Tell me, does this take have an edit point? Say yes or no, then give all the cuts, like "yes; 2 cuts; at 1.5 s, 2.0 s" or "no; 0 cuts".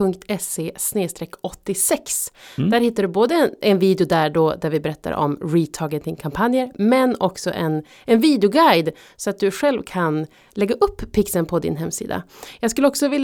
no; 0 cuts